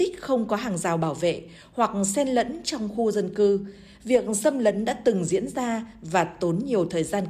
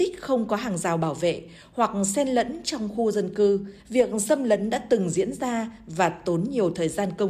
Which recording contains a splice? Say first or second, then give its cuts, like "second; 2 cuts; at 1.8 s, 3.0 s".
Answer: second; 1 cut; at 3.8 s